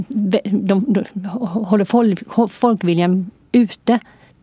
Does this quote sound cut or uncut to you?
uncut